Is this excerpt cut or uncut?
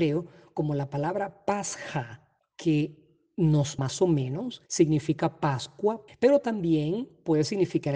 cut